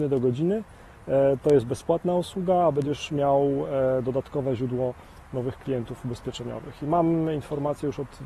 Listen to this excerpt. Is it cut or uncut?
uncut